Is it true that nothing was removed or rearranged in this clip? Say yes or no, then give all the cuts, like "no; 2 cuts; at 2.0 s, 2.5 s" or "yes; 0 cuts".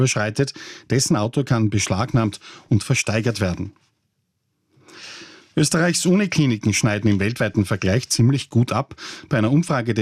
yes; 0 cuts